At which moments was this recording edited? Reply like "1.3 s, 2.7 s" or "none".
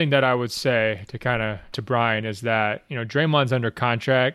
1.7 s